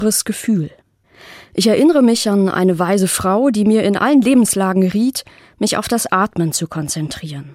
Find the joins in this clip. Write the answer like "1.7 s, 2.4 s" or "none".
none